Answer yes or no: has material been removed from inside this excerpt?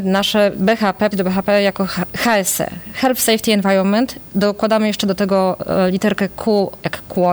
yes